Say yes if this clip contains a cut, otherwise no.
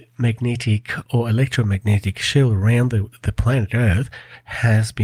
no